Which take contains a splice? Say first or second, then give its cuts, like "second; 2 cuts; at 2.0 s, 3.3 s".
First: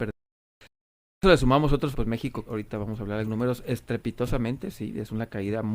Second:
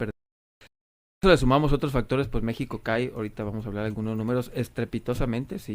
first; 3 cuts; at 1.9 s, 2.5 s, 3.3 s